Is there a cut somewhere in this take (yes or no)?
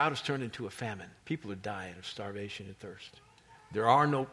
yes